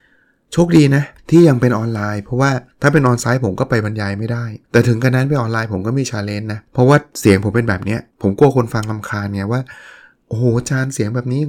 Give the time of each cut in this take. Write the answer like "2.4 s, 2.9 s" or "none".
1.2 s, 2.7 s, 4.6 s, 6.7 s, 8.1 s